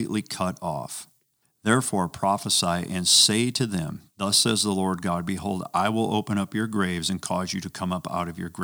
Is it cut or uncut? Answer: cut